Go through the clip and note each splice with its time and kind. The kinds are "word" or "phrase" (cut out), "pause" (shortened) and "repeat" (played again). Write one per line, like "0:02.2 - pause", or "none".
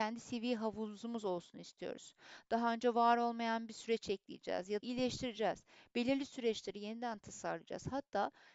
0:04.8 - word

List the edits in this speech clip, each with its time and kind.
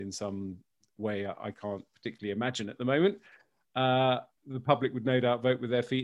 0:04.4 - pause

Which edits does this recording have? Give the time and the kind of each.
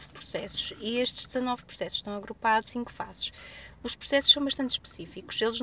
0:02.7 - word

